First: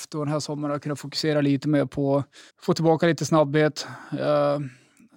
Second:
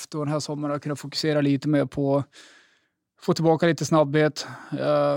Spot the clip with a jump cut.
first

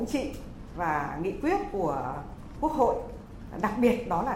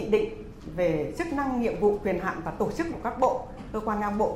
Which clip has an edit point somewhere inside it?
second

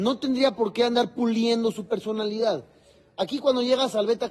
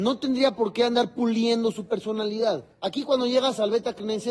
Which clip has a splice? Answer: second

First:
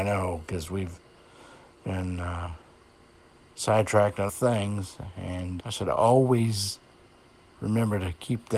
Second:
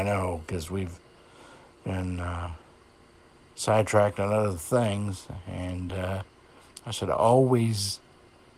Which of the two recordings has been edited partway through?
first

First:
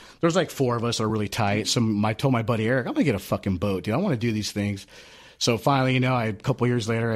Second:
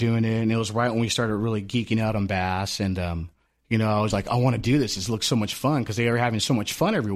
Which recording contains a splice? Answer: second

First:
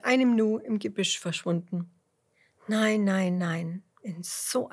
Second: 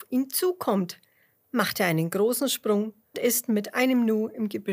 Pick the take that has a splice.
second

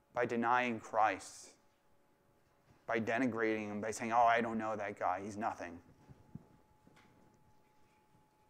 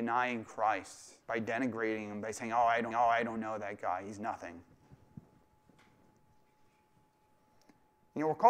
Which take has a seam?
second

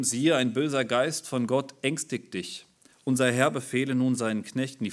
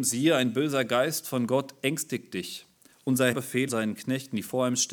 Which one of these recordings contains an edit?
second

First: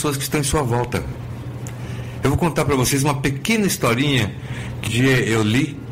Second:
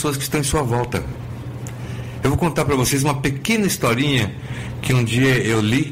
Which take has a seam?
first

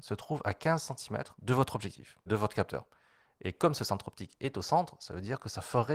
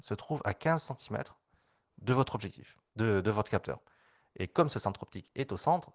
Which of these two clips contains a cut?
first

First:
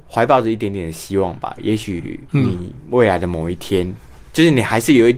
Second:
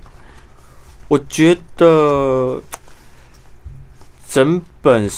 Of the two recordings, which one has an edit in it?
first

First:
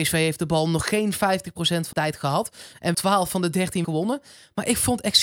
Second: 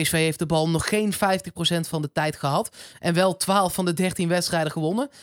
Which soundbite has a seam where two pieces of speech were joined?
first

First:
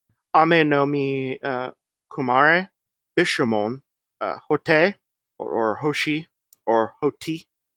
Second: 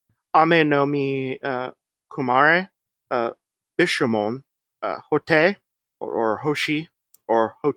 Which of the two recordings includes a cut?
first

